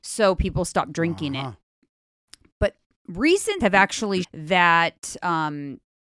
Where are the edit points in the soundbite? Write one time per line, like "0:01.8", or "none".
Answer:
0:03.6
0:04.2

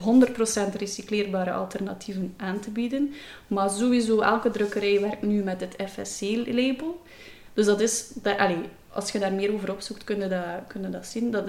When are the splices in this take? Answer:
none

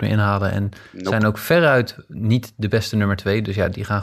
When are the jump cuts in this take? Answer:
none

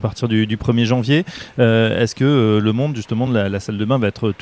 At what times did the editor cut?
none

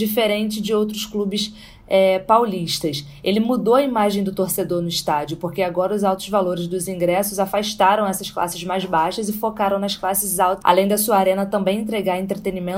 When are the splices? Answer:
0:10.6

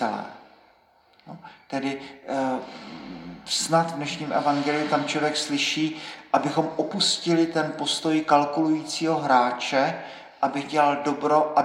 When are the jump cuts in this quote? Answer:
none

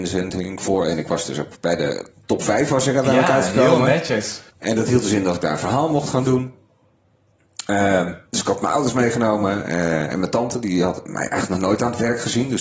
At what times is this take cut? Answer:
0:04.5
0:08.3

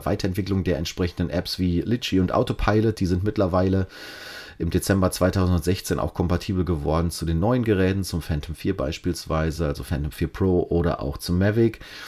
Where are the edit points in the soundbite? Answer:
none

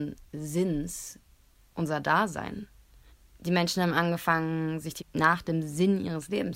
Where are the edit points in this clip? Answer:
0:03.1
0:05.0

